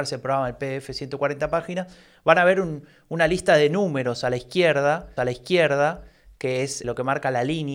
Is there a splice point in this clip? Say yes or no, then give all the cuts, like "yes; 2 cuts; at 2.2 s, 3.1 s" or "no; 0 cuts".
yes; 2 cuts; at 5.2 s, 6.8 s